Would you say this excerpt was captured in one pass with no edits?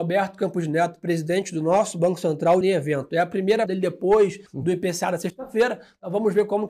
no; 3 cuts; at 2.6 s, 3.7 s, 4.5 s

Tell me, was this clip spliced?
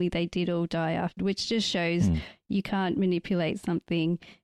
yes; 1 cut; at 1.2 s

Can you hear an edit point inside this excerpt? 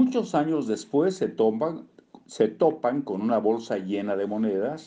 no; 0 cuts

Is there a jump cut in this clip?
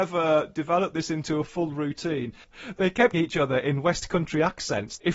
yes; 1 cut; at 3.1 s

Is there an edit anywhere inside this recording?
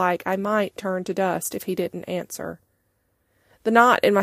no; 0 cuts

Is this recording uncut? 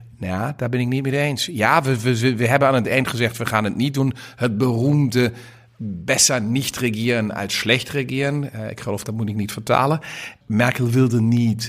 yes; 0 cuts

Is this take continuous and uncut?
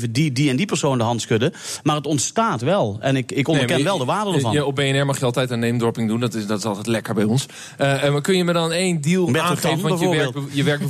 yes; 0 cuts

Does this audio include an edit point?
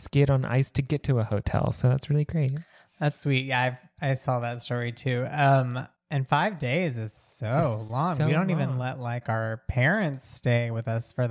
yes; 1 cut; at 3.1 s

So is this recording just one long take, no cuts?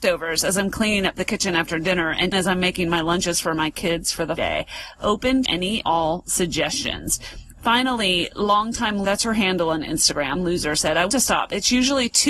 no; 7 cuts; at 2.3 s, 4.4 s, 5.4 s, 5.8 s, 9.0 s, 10.3 s, 11.1 s

